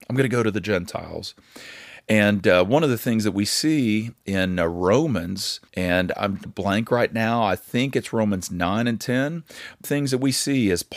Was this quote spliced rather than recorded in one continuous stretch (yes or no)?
yes